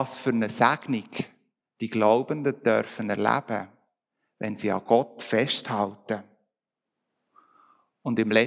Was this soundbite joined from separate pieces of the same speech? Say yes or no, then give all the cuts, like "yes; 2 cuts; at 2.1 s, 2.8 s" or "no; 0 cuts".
no; 0 cuts